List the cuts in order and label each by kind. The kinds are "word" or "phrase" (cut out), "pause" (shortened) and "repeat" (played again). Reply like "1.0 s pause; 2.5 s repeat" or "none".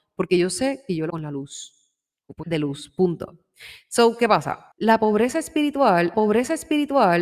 1.1 s word; 2.4 s phrase; 4.7 s pause; 6.1 s repeat